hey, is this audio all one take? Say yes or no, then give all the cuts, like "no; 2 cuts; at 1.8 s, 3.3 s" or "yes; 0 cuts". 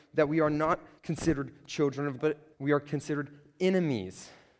no; 3 cuts; at 1.0 s, 2.2 s, 2.5 s